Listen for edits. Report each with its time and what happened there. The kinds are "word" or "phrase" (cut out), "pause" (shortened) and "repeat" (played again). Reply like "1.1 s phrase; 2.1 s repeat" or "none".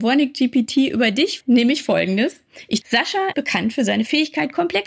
1.4 s word; 2.8 s word; 3.3 s word